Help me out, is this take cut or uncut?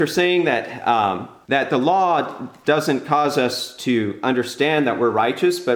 uncut